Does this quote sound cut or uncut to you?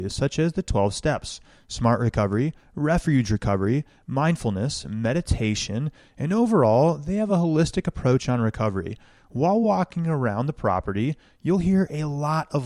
uncut